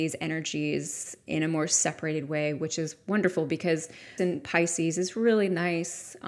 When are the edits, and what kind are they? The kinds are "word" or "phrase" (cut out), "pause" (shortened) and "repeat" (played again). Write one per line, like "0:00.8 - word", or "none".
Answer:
0:04.2 - word